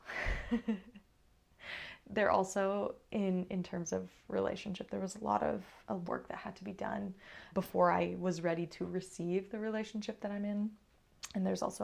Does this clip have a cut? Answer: yes; 2 cuts; at 6.1 s, 7.5 s

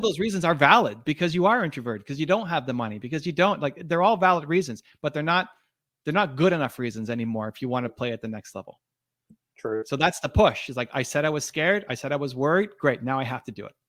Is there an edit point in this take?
no; 0 cuts

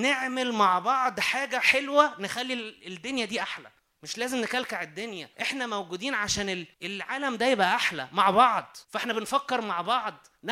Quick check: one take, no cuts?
no; 4 cuts; at 3.8 s, 5.3 s, 6.7 s, 8.8 s

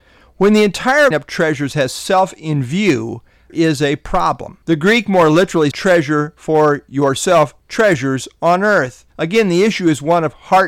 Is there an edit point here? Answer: yes; 5 cuts; at 1.1 s, 3.5 s, 4.6 s, 5.7 s, 9.1 s

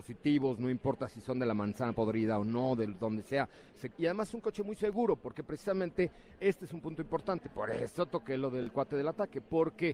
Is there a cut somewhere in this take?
yes; 1 cut; at 3.9 s

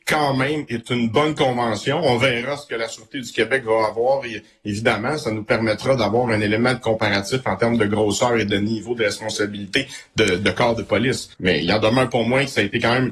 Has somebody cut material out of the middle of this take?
yes; 1 cut; at 11.3 s

